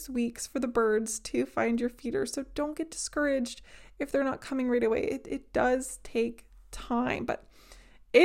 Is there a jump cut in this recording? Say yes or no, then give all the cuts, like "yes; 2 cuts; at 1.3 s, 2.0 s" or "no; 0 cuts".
no; 0 cuts